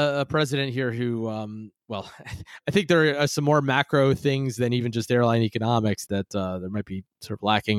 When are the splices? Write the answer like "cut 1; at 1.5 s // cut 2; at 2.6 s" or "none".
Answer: cut 1; at 6.1 s